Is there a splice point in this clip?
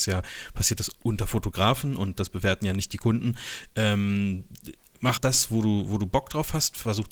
yes; 1 cut; at 5.2 s

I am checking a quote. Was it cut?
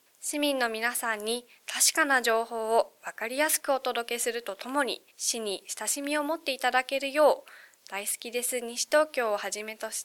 yes; 1 cut; at 5.1 s

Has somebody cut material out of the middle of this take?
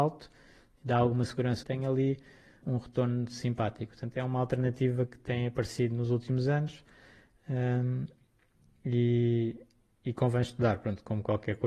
yes; 3 cuts; at 1.6 s, 2.6 s, 5.1 s

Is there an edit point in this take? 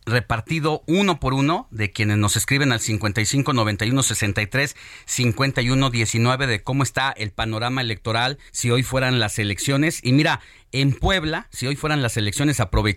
yes; 1 cut; at 8.5 s

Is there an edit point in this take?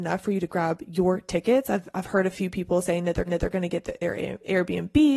yes; 1 cut; at 3.3 s

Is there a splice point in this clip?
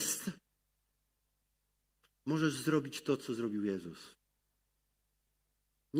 no; 0 cuts

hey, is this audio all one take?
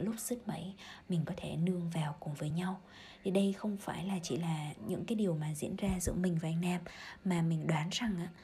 yes; 0 cuts

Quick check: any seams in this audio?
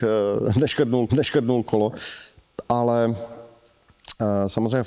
yes; 1 cut; at 1.1 s

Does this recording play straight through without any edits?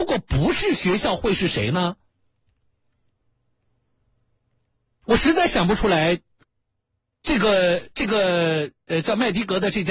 no; 1 cut; at 6.4 s

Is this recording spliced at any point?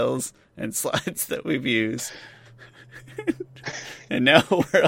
no; 0 cuts

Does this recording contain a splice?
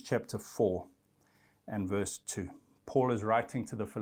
no; 0 cuts

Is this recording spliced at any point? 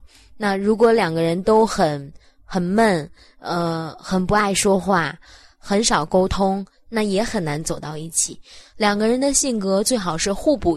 no; 0 cuts

